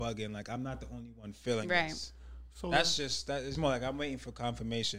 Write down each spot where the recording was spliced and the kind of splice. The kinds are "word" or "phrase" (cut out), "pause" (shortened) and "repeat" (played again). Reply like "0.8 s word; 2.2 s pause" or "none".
3.5 s word